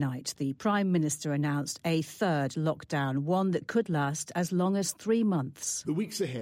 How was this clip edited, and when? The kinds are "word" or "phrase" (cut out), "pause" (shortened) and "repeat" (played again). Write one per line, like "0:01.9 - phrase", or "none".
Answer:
none

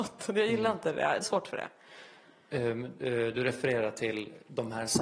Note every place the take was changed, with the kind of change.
0:01.2 - phrase

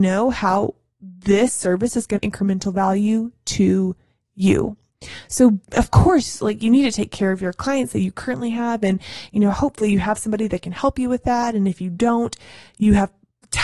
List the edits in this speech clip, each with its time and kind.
0:02.2 - phrase
0:05.6 - pause

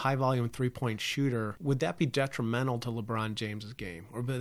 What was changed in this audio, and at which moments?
none

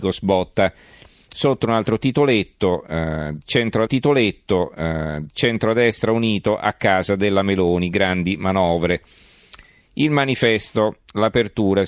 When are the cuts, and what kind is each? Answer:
0:03.9 - repeat

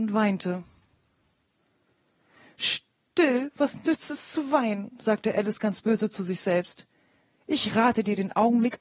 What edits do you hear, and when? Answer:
none

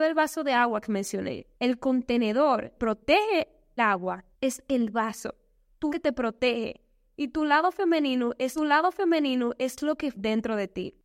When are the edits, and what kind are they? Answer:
0:01.5 - pause
0:02.8 - word
0:03.8 - word
0:04.3 - pause
0:05.9 - phrase
0:08.6 - repeat
0:10.1 - word

